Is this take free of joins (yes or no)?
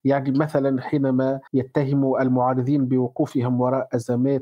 no